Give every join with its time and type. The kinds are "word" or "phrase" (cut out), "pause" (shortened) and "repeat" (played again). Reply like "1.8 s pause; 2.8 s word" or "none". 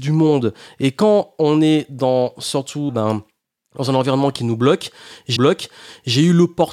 2.9 s phrase; 5.4 s repeat